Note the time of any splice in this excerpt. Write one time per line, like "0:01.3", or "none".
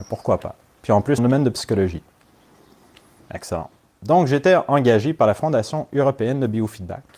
0:01.2